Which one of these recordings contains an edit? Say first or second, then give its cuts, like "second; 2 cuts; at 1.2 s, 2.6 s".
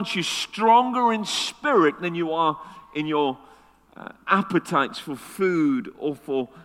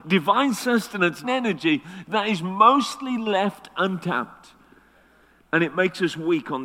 second; 1 cut; at 1.2 s